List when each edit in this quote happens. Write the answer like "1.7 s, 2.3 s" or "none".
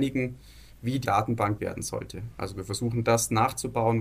1.0 s, 1.6 s